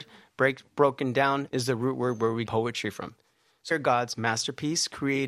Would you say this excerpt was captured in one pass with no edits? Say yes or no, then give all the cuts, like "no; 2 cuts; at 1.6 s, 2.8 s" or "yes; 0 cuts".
no; 3 cuts; at 1.5 s, 2.5 s, 3.7 s